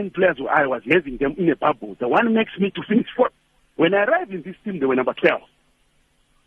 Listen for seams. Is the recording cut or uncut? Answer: uncut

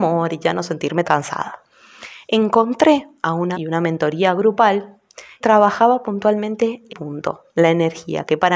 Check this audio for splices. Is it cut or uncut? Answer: cut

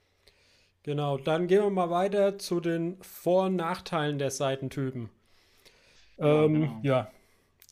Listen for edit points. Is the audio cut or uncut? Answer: uncut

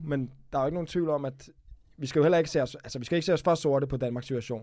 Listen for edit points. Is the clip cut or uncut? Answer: uncut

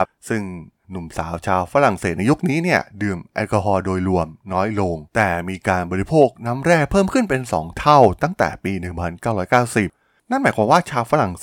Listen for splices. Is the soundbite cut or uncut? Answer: cut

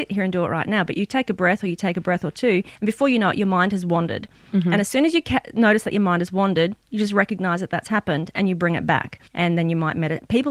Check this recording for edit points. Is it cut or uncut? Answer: cut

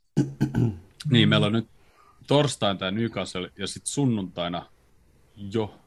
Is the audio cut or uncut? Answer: cut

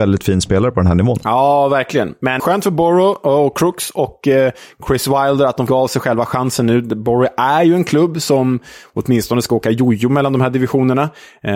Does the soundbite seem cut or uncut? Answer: cut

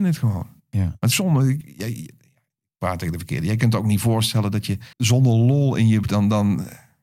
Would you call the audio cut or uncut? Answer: cut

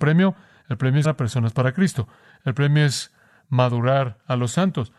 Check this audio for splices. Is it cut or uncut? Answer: cut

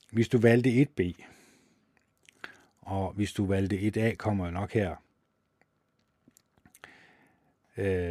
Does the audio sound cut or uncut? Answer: uncut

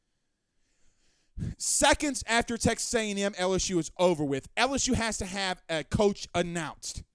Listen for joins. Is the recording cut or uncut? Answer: uncut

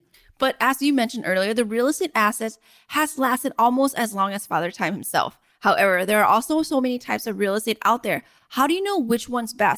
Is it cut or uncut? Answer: uncut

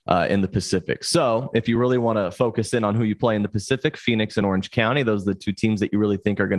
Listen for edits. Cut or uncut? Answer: uncut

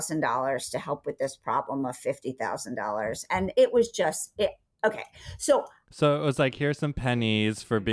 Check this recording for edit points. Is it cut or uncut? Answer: uncut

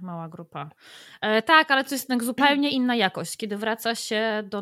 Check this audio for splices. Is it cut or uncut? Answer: uncut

